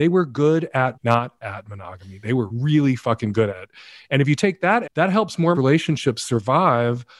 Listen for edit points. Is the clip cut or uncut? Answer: cut